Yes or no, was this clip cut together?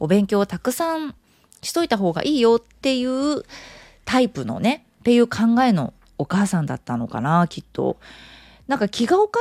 no